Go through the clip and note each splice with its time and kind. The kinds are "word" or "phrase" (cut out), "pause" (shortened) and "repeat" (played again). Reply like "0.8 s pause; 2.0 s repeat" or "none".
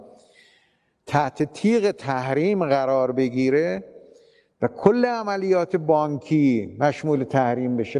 none